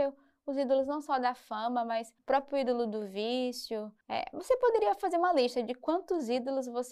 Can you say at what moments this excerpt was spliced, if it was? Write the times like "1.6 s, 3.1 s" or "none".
2.2 s, 4.0 s